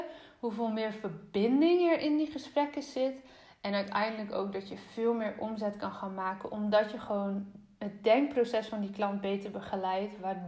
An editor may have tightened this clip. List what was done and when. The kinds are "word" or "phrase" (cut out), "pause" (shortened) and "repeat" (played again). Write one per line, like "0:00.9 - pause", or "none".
none